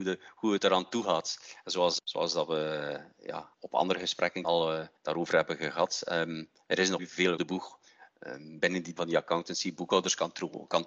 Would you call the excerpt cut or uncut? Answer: cut